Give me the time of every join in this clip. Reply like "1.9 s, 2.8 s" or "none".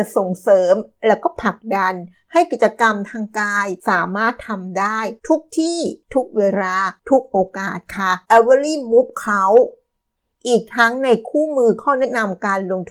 3.8 s, 5.2 s, 6.0 s, 7.0 s, 8.3 s, 10.2 s